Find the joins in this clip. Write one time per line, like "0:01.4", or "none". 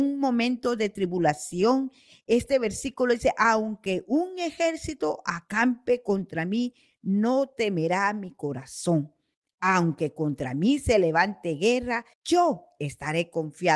0:12.1